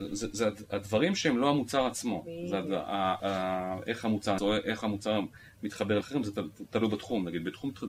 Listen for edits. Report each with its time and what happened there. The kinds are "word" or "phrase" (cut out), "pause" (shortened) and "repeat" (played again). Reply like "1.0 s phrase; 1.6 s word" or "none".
3.2 s word; 4.4 s word; 6.0 s word